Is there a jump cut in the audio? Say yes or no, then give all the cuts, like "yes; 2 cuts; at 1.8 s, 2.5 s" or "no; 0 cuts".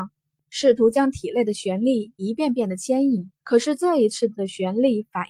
yes; 1 cut; at 3.4 s